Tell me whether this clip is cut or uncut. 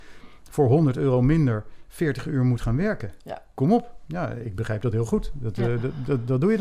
uncut